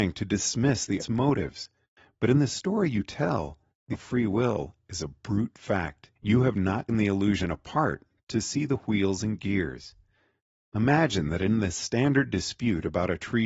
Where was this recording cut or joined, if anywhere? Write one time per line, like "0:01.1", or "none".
0:01.0
0:03.9
0:06.2
0:06.9